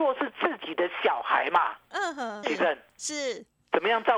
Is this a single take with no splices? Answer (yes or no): no